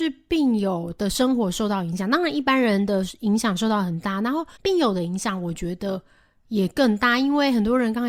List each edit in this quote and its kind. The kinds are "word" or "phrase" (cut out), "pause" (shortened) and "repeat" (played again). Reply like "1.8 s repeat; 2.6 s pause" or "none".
4.6 s pause